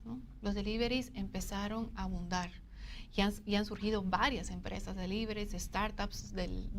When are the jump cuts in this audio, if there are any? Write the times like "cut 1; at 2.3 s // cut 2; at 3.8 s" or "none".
none